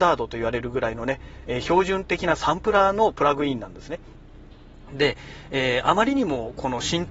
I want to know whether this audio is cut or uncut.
uncut